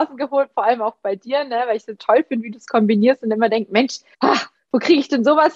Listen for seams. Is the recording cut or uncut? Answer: cut